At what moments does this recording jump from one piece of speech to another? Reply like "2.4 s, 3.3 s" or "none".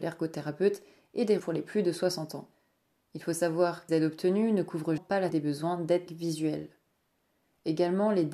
1.4 s, 3.9 s, 5.0 s, 5.3 s, 6.1 s